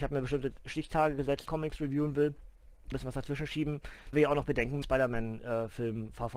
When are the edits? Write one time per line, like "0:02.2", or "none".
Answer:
0:01.5
0:02.9
0:04.1
0:04.8